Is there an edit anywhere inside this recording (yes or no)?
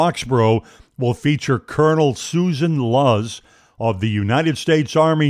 no